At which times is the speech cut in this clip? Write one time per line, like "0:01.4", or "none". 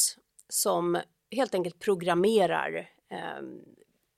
none